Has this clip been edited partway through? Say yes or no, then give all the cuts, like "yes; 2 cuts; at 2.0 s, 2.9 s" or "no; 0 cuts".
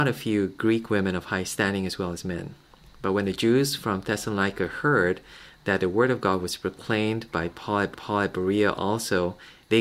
yes; 1 cut; at 7.9 s